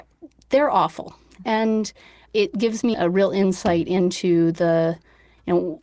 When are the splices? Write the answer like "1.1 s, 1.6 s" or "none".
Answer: 2.9 s

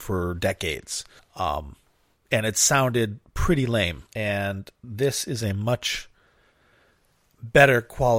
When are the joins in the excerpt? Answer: 1.2 s, 4.1 s

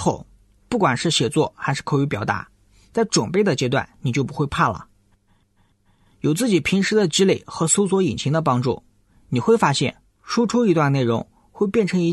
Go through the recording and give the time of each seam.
none

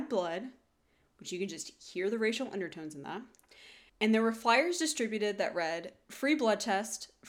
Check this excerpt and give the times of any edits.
3.9 s

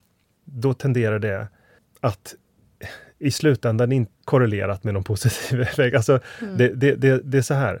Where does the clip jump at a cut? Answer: 1.8 s, 4.1 s

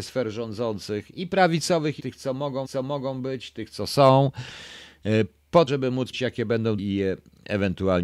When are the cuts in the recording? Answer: 2.0 s, 2.6 s, 5.7 s, 6.1 s, 6.8 s

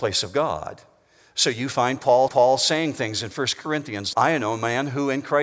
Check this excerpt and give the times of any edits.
2.3 s, 4.1 s

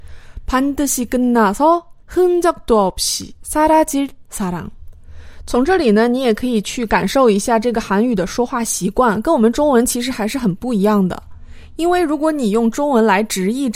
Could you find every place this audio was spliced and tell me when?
2.0 s

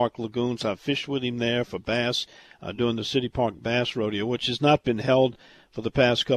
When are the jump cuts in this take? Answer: none

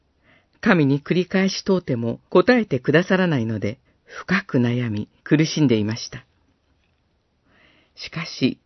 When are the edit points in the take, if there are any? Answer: 2.3 s, 3.9 s, 5.2 s

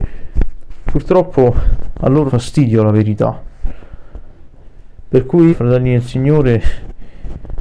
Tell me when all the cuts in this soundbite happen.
2.3 s, 5.5 s

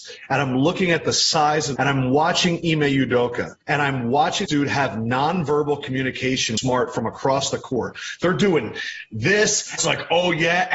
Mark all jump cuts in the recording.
1.8 s, 3.6 s, 4.5 s, 6.6 s, 9.8 s

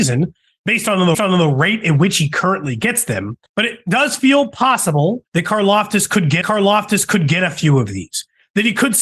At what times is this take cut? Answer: 1.1 s, 3.5 s, 5.3 s, 6.4 s

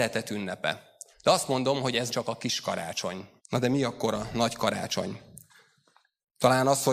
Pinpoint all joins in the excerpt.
1.1 s, 2.1 s, 3.4 s

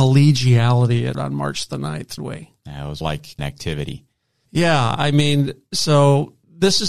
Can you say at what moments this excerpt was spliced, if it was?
1.1 s, 2.2 s, 3.0 s, 3.4 s

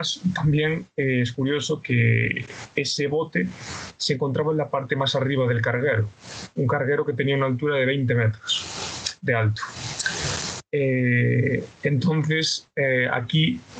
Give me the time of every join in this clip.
none

